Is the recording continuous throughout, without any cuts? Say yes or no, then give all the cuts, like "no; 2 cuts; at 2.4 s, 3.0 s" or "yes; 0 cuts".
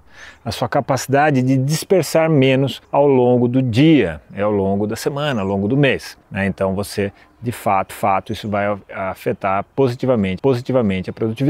no; 4 cuts; at 2.8 s, 6.2 s, 7.9 s, 10.4 s